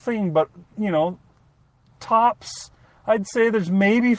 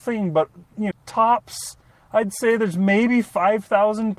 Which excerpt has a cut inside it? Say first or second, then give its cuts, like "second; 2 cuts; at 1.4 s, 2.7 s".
second; 1 cut; at 0.9 s